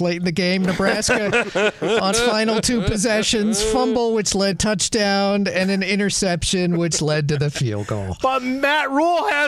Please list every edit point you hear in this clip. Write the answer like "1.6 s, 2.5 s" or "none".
2.1 s, 4.5 s